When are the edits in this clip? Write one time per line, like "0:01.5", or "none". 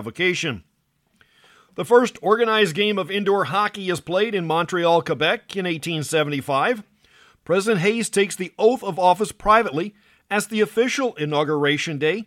none